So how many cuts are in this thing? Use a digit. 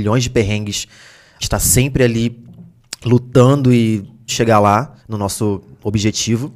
3